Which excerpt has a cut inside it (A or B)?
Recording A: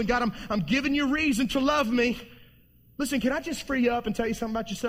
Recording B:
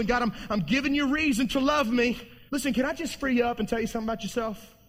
B